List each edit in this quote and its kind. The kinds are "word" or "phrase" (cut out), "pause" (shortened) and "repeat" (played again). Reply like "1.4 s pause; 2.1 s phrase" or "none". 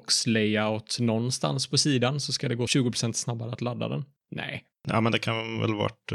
2.7 s word